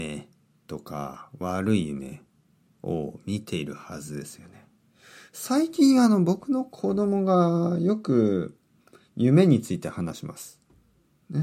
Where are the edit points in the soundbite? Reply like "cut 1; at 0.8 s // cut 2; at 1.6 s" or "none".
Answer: none